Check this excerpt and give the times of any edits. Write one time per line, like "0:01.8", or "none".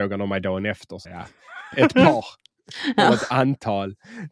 0:01.0